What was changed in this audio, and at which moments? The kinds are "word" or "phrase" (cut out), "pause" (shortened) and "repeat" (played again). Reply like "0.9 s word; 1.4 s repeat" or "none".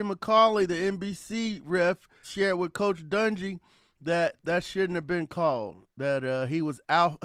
2.2 s word; 4.4 s word